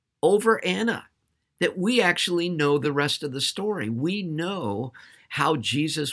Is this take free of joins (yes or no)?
yes